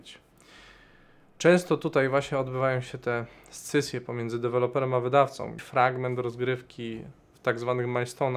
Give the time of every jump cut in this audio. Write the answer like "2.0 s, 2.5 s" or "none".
5.6 s